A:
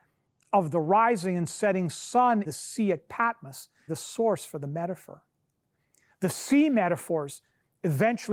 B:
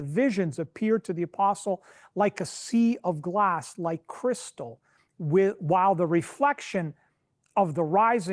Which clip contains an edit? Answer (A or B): A